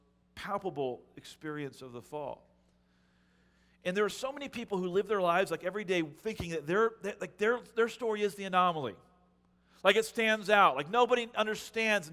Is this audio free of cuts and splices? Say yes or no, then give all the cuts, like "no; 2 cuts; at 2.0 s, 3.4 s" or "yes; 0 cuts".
yes; 0 cuts